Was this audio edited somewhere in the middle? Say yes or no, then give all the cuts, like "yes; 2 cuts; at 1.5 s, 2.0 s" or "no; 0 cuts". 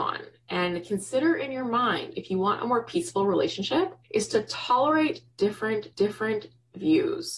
yes; 2 cuts; at 4.0 s, 5.9 s